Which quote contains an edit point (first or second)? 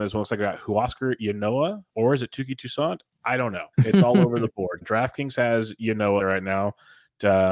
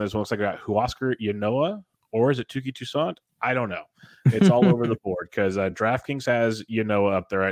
first